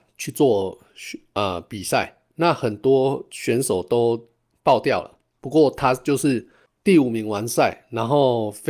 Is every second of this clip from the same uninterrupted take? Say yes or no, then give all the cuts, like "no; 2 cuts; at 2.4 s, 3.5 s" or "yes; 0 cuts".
yes; 0 cuts